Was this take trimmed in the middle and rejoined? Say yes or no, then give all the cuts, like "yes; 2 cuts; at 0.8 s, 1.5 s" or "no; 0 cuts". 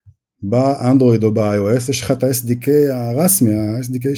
no; 0 cuts